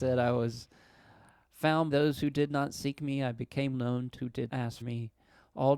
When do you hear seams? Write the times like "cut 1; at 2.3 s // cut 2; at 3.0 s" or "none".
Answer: cut 1; at 1.9 s // cut 2; at 3.7 s // cut 3; at 4.2 s // cut 4; at 4.5 s // cut 5; at 4.8 s